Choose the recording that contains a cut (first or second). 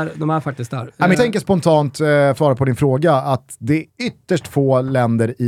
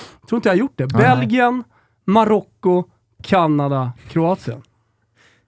first